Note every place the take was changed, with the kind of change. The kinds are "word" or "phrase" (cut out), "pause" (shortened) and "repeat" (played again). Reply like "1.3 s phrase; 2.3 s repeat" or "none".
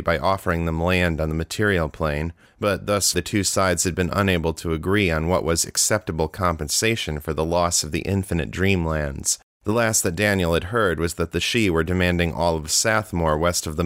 2.5 s pause; 3.1 s word; 9.5 s pause